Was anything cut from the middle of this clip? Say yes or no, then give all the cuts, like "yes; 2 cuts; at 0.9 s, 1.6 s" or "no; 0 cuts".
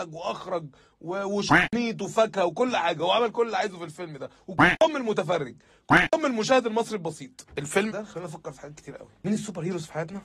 yes; 1 cut; at 7.9 s